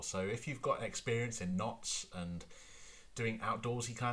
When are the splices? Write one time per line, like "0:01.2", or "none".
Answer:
none